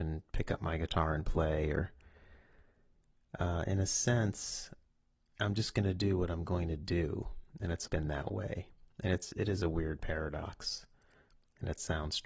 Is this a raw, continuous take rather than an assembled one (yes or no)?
no